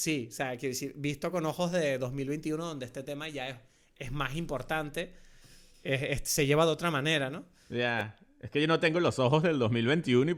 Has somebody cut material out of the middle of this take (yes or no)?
no